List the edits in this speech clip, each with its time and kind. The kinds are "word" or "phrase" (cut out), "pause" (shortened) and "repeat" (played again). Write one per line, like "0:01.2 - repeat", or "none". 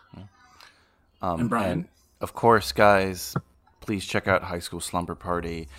none